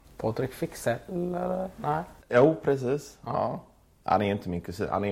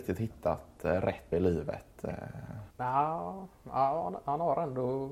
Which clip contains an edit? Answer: second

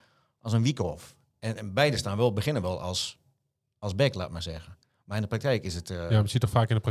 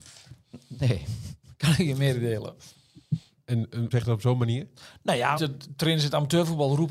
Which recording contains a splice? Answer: second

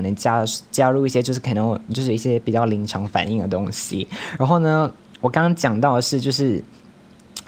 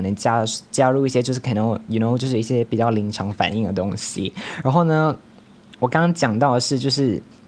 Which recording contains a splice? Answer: first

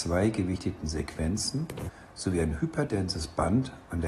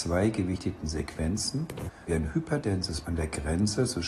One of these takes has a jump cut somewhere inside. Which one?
second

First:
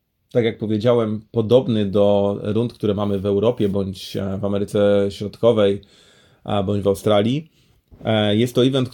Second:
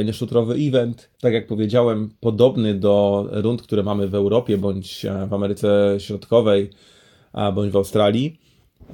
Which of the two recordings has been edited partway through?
second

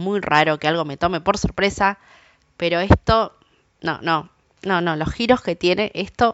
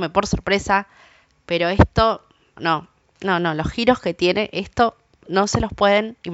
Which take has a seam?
second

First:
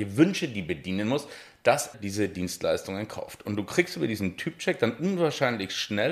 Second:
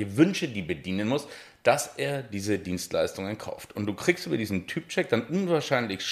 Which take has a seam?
first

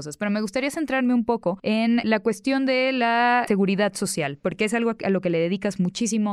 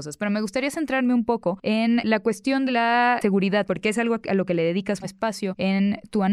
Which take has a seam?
second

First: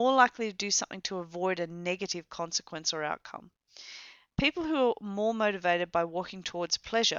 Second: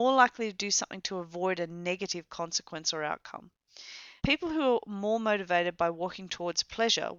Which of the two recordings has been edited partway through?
second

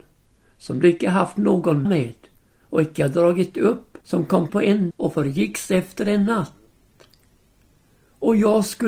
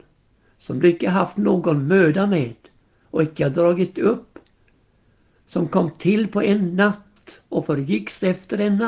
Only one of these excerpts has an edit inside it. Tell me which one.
first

